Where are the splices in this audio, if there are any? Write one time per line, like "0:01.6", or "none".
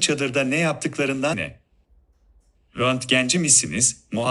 0:01.3

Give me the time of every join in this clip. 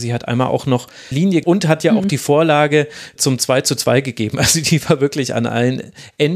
0:01.1
0:01.4
0:03.2

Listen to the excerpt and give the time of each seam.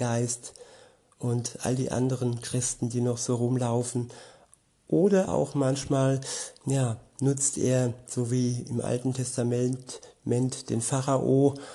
0:05.3

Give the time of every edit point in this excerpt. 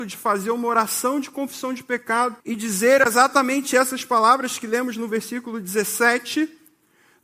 0:02.4

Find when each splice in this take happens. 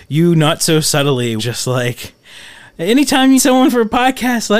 0:01.4
0:03.4

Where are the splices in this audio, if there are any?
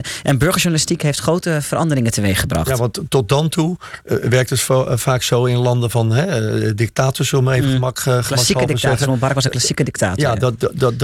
none

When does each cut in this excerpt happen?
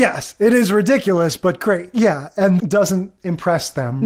0:02.6

